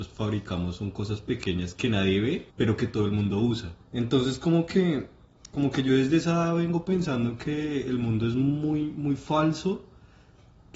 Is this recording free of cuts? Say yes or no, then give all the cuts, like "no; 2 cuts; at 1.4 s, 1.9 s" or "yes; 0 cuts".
no; 2 cuts; at 2.5 s, 3.8 s